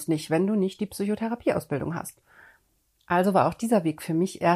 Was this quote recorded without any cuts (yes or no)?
yes